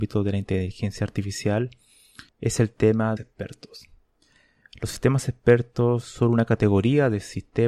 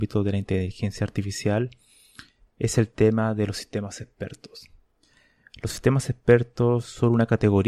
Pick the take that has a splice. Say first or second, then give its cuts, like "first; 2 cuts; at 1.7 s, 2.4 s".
first; 2 cuts; at 2.3 s, 3.2 s